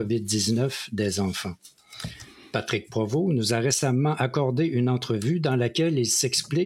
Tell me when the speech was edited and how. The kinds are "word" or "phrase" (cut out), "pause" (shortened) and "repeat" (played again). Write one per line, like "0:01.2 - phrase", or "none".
none